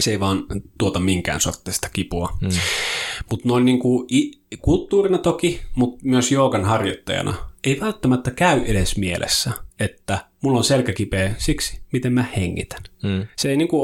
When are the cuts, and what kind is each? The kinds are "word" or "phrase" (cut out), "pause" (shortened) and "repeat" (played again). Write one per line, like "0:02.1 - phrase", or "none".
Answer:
0:09.7 - pause